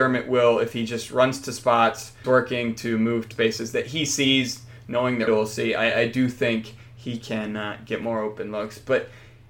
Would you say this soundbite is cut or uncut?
cut